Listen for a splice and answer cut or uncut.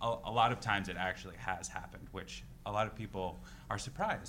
uncut